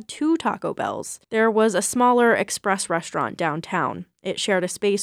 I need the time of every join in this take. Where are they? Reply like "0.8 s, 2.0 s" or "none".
1.2 s